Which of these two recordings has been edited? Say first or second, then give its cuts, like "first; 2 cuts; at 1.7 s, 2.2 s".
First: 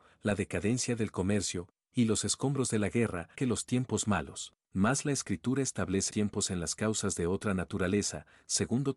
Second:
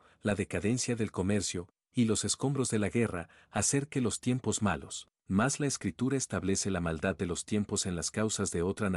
first; 2 cuts; at 3.3 s, 6.1 s